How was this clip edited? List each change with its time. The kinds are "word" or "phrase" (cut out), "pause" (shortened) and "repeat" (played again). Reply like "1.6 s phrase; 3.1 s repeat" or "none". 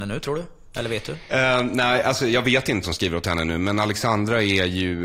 2.8 s word